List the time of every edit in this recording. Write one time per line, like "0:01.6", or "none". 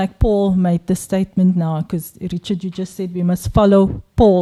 none